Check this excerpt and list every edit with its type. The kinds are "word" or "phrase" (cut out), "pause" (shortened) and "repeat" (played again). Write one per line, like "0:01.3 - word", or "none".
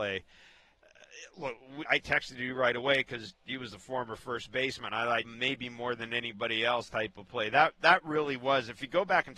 0:01.9 - word
0:05.2 - phrase
0:06.9 - phrase